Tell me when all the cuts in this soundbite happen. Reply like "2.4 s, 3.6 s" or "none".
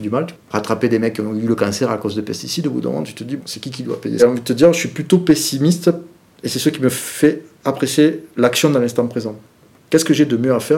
3.4 s, 4.2 s